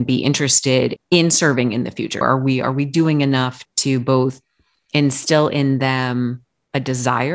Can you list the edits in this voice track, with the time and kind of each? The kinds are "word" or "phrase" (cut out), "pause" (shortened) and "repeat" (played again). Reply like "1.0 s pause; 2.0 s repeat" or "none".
2.2 s word